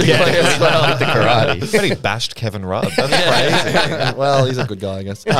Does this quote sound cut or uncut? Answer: uncut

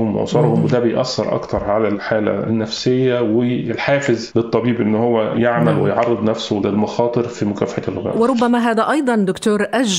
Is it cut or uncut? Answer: uncut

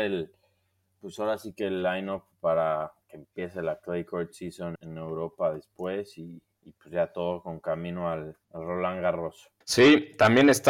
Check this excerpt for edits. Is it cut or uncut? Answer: cut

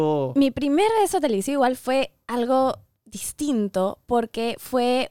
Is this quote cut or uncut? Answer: uncut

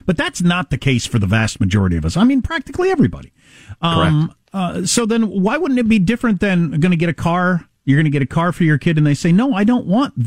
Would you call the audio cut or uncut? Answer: uncut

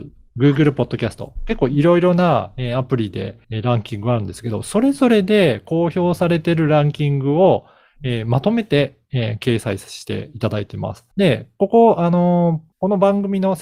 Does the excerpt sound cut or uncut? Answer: cut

